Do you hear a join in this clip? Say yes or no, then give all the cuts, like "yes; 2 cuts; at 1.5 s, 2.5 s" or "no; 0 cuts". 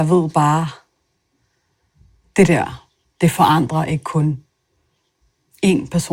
no; 0 cuts